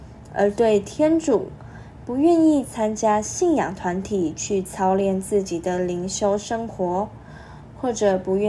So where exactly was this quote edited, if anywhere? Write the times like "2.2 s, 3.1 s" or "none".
2.0 s